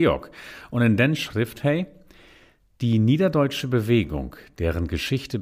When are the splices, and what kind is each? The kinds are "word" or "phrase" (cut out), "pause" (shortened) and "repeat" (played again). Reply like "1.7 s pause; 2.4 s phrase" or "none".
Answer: none

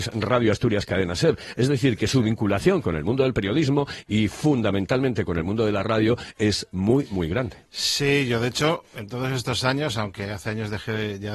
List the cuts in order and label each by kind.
none

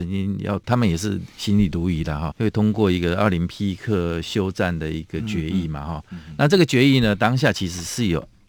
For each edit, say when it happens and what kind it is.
2.3 s word

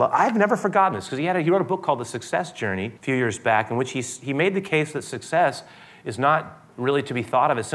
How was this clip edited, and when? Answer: 3.0 s pause

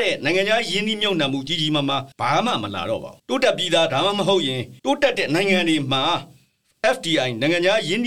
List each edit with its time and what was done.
2.1 s pause; 3.2 s pause; 4.8 s pause

